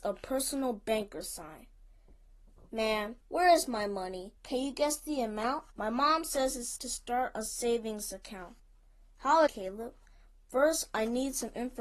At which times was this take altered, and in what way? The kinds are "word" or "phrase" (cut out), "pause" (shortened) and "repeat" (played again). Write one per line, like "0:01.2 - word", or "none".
0:03.2 - pause
0:04.4 - pause
0:05.7 - pause
0:06.8 - word
0:09.5 - word